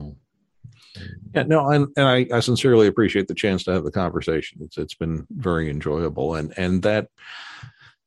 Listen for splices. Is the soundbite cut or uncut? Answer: uncut